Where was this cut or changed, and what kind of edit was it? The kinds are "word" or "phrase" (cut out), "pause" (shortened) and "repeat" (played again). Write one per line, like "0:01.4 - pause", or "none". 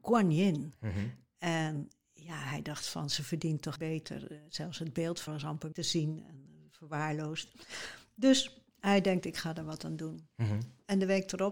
0:03.8 - word
0:04.5 - pause
0:05.3 - word
0:05.7 - word
0:08.7 - pause